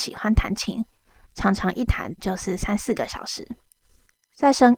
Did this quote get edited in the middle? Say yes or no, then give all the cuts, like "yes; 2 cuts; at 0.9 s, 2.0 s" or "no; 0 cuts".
no; 0 cuts